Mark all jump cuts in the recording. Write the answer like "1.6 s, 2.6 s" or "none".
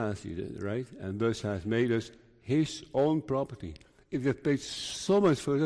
none